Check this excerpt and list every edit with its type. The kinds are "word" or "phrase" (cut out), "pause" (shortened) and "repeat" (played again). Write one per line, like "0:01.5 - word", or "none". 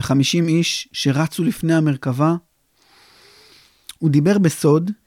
none

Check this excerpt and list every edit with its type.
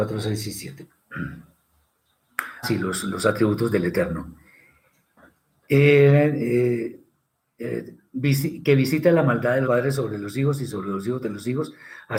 0:02.6 - word
0:09.6 - word

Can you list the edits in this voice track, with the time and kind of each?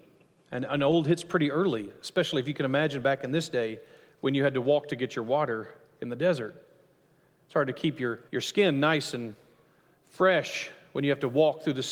0:08.3 - pause

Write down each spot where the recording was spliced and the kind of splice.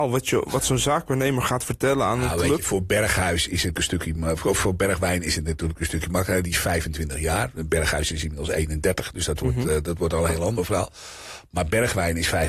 0:03.7 - word

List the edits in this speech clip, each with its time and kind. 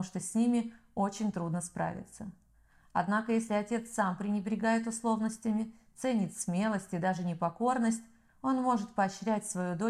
none

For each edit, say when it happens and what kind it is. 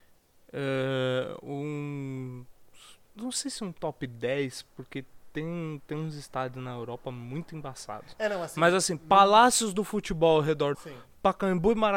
0:03.0 - pause
0:10.7 - phrase

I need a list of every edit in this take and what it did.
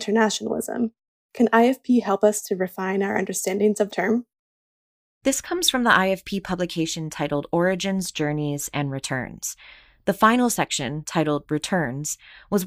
0:03.9 - word

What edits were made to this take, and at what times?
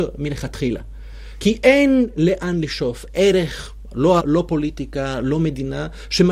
0:03.1 - word
0:04.2 - word

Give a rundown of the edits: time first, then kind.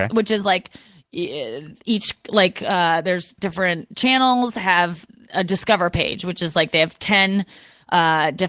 none

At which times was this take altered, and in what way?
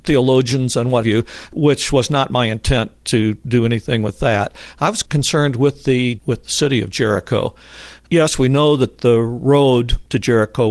0:01.0 - word
0:06.2 - word

